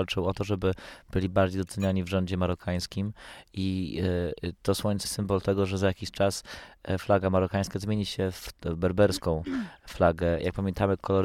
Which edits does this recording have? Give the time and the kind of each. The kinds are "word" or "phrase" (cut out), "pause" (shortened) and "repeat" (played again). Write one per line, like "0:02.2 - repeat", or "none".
0:05.1 - word
0:08.5 - word